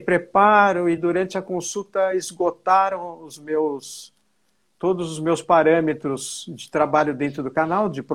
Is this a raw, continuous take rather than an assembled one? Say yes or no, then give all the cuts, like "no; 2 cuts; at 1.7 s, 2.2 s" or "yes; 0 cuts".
yes; 0 cuts